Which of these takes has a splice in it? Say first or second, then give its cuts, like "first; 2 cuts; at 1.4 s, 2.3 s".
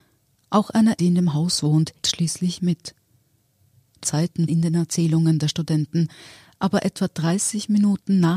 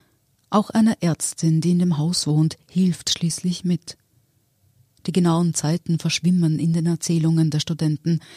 first; 4 cuts; at 1.0 s, 2.0 s, 4.0 s, 4.5 s